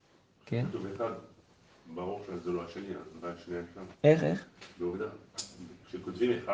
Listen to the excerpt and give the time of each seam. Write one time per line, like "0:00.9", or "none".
0:03.9